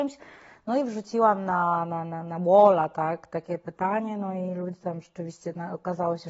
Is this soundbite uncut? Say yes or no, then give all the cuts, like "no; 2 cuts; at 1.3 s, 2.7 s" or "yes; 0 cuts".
yes; 0 cuts